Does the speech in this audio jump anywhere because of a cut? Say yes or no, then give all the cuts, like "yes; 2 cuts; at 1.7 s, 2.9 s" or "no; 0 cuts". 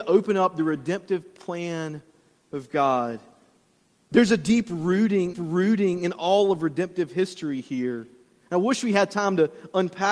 yes; 1 cut; at 5.3 s